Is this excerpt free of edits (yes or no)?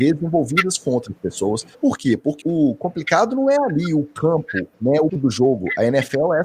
no